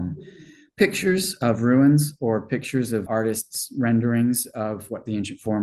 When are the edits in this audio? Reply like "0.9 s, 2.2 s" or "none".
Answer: 3.1 s

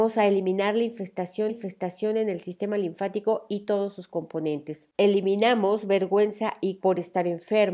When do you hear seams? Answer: 1.5 s, 4.9 s, 6.8 s

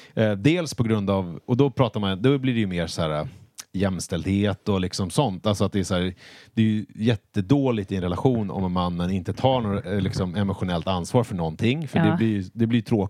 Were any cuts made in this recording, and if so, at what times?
none

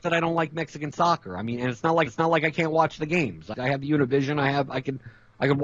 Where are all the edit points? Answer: 2.1 s, 3.5 s

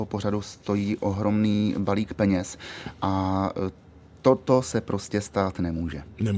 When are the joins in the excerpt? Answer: none

